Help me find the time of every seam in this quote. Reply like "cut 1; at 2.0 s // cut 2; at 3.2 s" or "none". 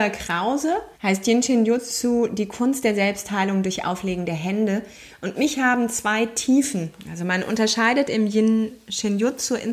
cut 1; at 0.9 s

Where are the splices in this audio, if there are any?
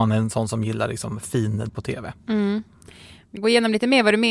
cut 1; at 1.7 s // cut 2; at 3.4 s

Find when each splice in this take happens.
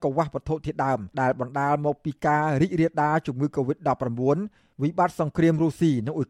cut 1; at 1.1 s

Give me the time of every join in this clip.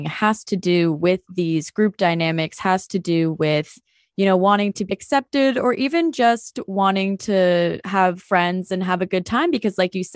cut 1; at 4.9 s // cut 2; at 8.2 s

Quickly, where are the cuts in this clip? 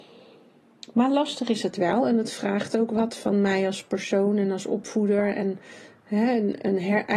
none

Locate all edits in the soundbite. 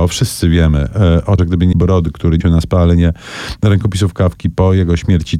cut 1; at 1.4 s // cut 2; at 1.7 s // cut 3; at 2.4 s

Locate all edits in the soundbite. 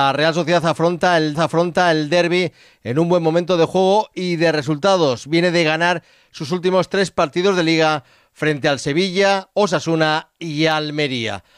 cut 1; at 1.3 s

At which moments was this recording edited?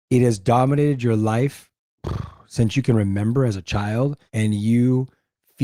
cut 1; at 4.3 s

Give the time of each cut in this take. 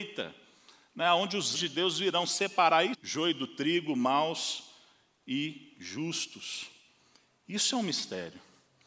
cut 1; at 1.5 s // cut 2; at 2.9 s

